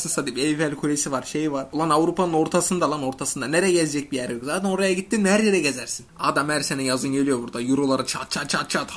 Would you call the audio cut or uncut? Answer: uncut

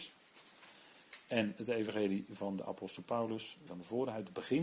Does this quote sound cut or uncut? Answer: cut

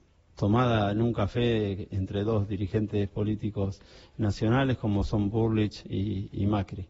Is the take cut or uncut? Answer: uncut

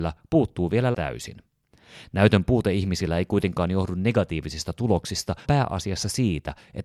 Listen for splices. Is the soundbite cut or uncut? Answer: cut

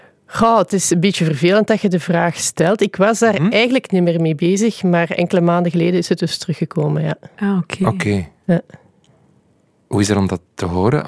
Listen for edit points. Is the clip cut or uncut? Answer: uncut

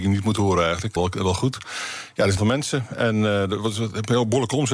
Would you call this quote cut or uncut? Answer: cut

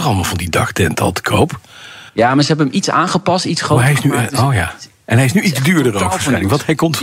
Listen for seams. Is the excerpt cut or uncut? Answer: cut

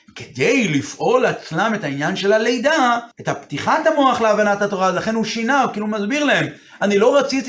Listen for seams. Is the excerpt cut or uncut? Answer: cut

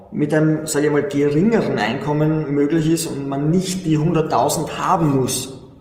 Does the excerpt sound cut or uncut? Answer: uncut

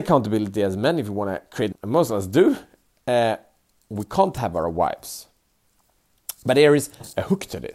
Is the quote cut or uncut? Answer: cut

